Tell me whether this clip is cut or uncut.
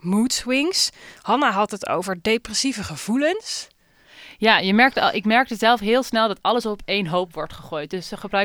uncut